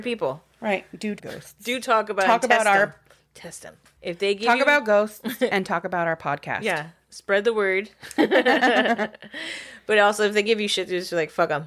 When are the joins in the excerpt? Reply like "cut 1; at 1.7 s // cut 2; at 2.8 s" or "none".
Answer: cut 1; at 1.2 s